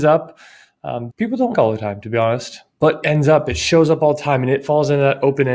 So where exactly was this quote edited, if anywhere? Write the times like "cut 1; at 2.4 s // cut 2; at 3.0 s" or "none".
cut 1; at 1.1 s // cut 2; at 1.5 s // cut 3; at 3.0 s